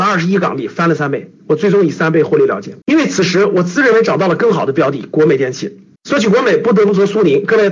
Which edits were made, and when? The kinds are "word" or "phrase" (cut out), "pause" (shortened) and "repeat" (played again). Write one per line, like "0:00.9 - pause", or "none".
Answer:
0:01.4 - pause
0:02.8 - pause
0:06.0 - pause